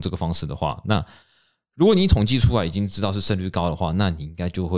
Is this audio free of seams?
yes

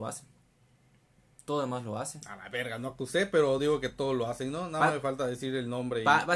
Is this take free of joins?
yes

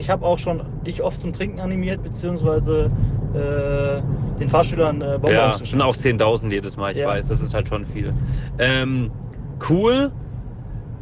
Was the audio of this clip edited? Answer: no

